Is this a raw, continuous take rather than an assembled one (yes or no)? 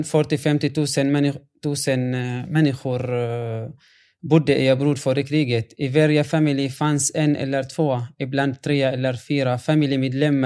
yes